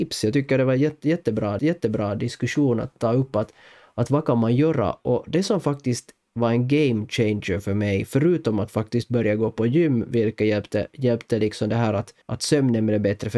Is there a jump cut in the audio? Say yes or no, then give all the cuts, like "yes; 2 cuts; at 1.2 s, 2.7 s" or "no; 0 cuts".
yes; 2 cuts; at 1.6 s, 12.2 s